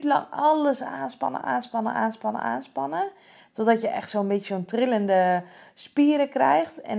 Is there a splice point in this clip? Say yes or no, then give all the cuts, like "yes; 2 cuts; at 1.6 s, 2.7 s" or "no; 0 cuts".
no; 0 cuts